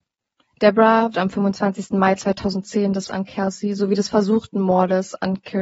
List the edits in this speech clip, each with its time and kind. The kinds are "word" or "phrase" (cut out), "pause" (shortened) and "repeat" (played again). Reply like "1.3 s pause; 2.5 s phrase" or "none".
1.1 s word; 3.1 s word

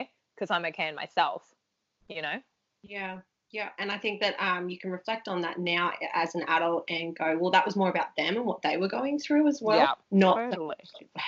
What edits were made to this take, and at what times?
10.0 s pause

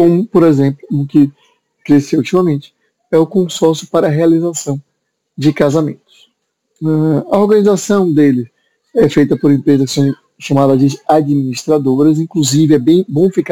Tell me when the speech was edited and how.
none

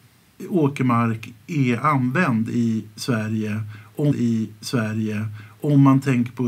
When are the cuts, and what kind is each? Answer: 4.1 s repeat

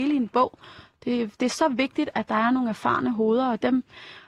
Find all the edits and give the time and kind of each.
none

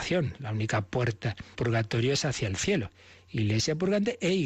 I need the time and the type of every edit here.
1.5 s word

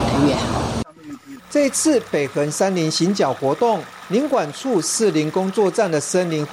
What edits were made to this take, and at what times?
1.4 s pause

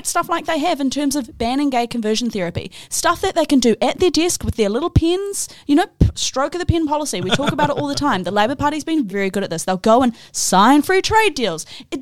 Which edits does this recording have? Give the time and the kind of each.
9.1 s word

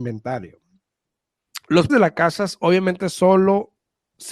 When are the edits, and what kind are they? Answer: 1.9 s word

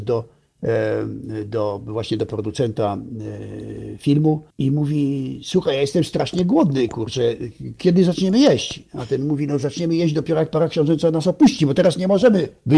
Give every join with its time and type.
4.5 s pause

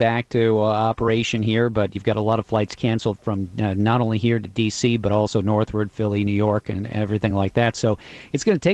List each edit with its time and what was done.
none

